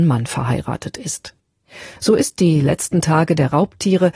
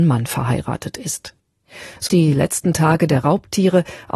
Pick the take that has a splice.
second; 1 cut; at 2.1 s

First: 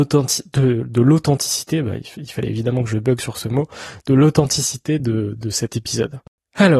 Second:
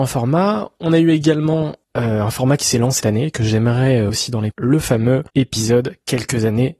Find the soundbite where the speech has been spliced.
second; 5 cuts; at 1.8 s, 3.0 s, 4.1 s, 4.5 s, 5.3 s

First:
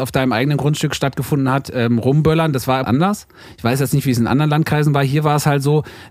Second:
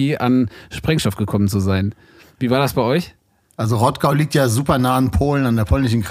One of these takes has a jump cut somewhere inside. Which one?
first; 1 cut; at 2.8 s

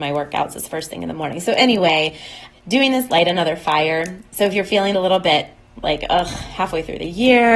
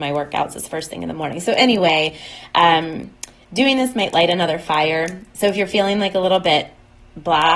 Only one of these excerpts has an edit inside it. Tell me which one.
first; 4 cuts; at 2.5 s, 3.1 s, 4.9 s, 5.8 s

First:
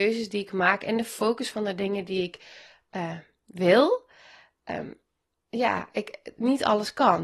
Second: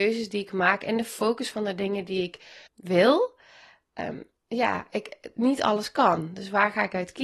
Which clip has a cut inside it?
second; 2 cuts; at 2.7 s, 4.4 s

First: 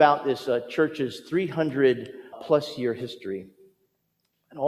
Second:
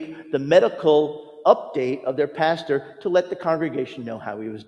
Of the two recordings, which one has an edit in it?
first; 1 cut; at 2.3 s

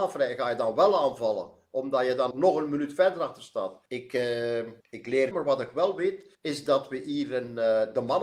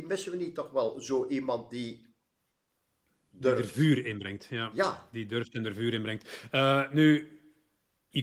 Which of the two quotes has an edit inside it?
first; 5 cuts; at 2.3 s, 3.9 s, 4.8 s, 5.3 s, 6.3 s

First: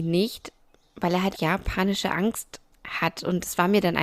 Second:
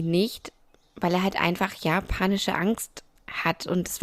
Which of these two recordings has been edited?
first; 1 cut; at 1.3 s

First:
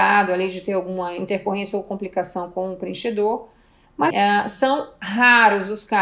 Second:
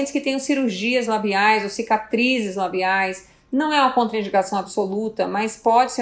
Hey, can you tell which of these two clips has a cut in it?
first; 1 cut; at 4.1 s

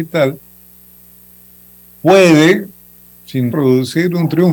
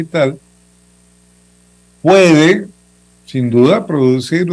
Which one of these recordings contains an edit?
first; 1 cut; at 3.5 s

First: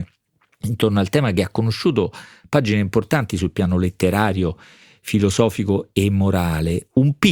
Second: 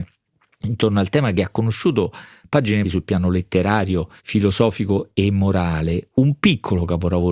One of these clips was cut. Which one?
second; 2 cuts; at 2.8 s, 4.2 s

